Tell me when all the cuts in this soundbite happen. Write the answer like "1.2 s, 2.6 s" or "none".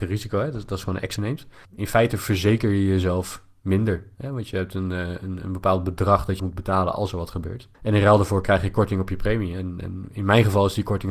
1.2 s, 1.6 s, 6.4 s, 7.7 s